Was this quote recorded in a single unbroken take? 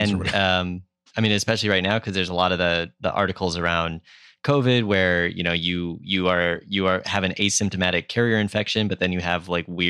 yes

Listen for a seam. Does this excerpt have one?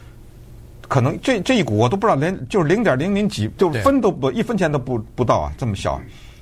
yes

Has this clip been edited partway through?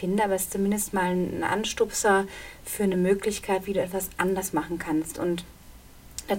no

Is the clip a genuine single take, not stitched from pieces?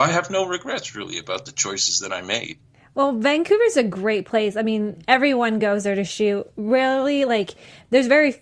yes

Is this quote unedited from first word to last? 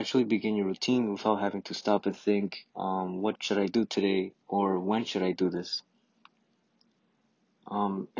no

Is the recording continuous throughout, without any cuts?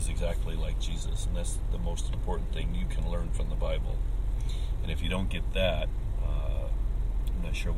yes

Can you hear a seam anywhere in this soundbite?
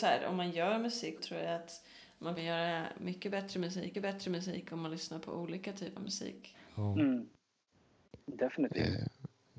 yes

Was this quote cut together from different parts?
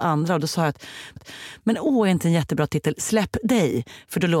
yes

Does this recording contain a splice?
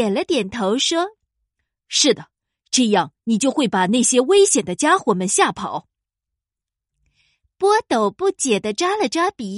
no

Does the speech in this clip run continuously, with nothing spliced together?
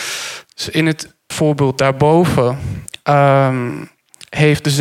no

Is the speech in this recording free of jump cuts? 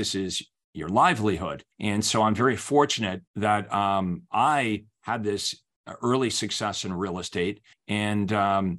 no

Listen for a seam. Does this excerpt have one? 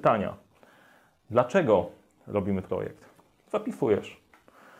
yes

